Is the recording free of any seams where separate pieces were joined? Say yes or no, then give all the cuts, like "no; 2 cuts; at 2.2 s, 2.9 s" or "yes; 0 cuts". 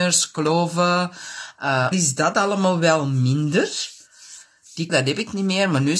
no; 2 cuts; at 1.9 s, 4.9 s